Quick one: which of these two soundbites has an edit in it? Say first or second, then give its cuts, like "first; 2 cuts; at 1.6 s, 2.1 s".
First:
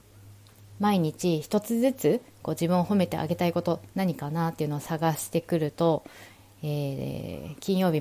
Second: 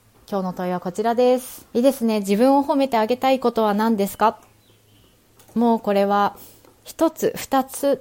second; 1 cut; at 1.7 s